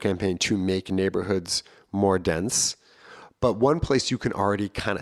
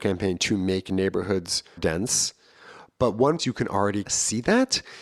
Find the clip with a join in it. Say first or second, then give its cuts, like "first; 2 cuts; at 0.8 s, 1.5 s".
second; 3 cuts; at 1.8 s, 3.4 s, 4.1 s